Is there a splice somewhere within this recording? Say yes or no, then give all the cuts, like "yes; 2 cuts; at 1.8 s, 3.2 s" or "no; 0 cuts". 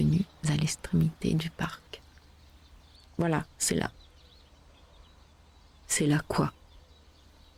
no; 0 cuts